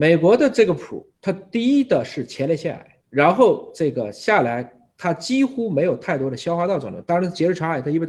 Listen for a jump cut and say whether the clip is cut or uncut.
cut